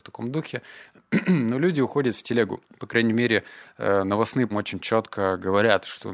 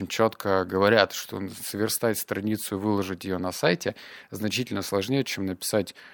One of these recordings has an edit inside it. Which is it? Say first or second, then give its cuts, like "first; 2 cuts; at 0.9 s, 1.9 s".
first; 2 cuts; at 2.6 s, 4.5 s